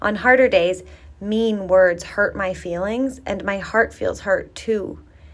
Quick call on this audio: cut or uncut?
uncut